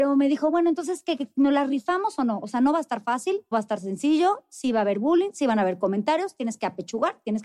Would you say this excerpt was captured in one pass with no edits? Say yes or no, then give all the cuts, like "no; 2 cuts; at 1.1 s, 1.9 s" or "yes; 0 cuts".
no; 1 cut; at 3.5 s